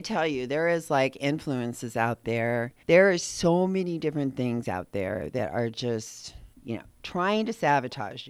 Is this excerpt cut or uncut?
cut